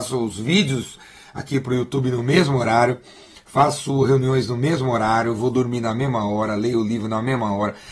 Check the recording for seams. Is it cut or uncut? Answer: uncut